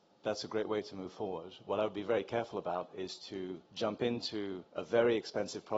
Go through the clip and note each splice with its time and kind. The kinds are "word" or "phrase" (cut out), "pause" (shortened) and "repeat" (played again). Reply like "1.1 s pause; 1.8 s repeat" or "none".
3.7 s pause; 4.7 s pause

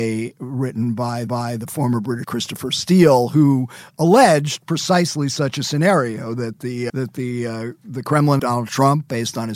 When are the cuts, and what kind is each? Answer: 1.3 s repeat; 2.2 s word; 6.9 s word; 8.4 s phrase

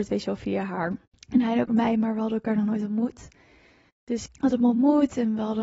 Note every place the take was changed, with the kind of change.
1.2 s pause; 1.7 s word; 4.3 s phrase

